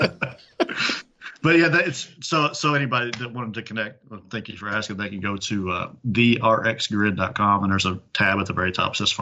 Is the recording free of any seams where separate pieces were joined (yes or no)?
no